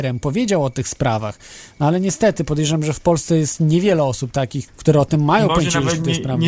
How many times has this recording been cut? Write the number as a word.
one